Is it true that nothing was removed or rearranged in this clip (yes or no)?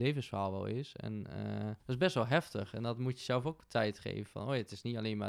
no